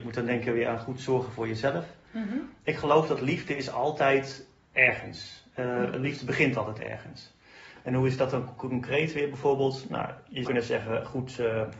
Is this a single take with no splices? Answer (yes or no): no